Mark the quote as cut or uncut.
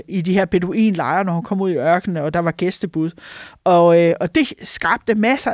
uncut